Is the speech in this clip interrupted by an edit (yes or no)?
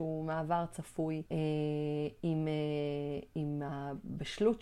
yes